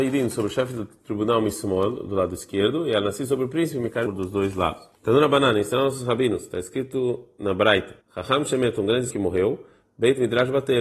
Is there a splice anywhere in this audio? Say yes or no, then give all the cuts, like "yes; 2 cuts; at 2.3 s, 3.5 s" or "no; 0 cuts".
yes; 4 cuts; at 4.1 s, 5.0 s, 8.0 s, 9.1 s